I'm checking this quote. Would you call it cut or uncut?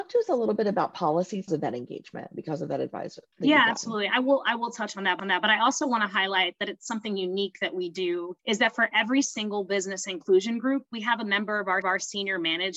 cut